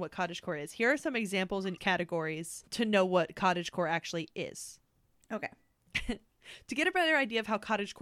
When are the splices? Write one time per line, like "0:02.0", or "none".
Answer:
0:01.8
0:02.7
0:05.1